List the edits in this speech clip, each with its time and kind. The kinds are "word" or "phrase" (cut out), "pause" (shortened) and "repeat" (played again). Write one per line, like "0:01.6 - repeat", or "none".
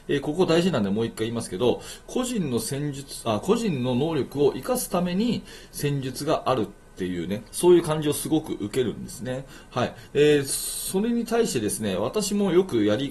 0:07.5 - pause
0:10.1 - word